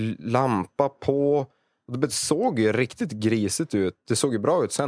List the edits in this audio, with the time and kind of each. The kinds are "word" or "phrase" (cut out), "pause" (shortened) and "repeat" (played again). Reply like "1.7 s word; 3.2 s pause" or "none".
none